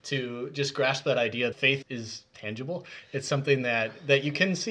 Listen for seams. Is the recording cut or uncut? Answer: cut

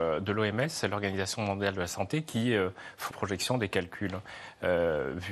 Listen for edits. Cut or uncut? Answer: cut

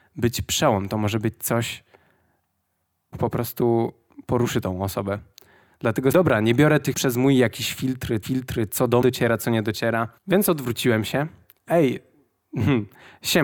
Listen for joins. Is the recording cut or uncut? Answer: cut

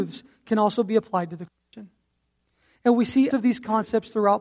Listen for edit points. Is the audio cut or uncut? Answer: cut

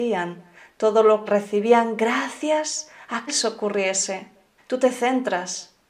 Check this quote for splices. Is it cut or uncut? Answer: cut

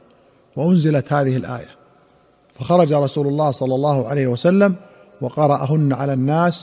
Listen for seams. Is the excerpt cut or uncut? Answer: uncut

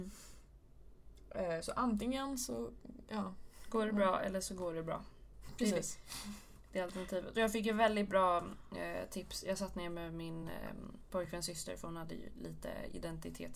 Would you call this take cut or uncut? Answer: uncut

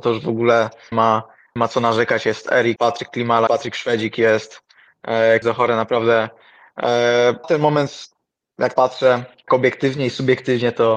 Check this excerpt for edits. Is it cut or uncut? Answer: cut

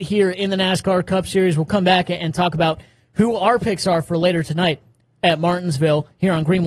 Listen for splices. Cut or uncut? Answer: uncut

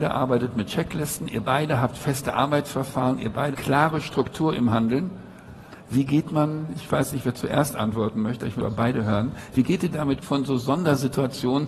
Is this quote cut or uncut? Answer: cut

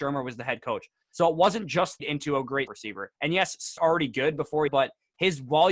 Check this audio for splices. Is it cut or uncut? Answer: cut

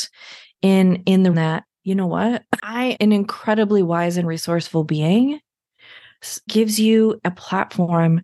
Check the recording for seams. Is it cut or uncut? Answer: cut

